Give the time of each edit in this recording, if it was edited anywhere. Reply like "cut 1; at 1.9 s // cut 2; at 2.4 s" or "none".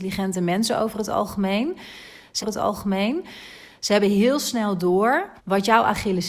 cut 1; at 2.4 s // cut 2; at 5.4 s